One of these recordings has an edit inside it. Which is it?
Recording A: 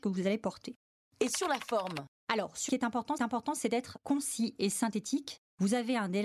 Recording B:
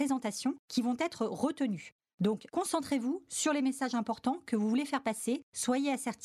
A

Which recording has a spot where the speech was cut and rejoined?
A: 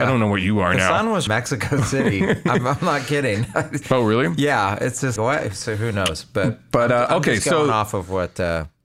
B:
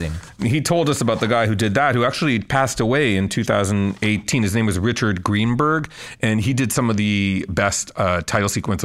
A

